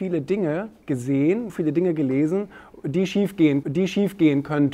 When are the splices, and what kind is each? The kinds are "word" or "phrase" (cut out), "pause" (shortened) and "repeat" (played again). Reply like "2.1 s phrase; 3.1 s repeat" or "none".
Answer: 1.5 s word; 3.6 s repeat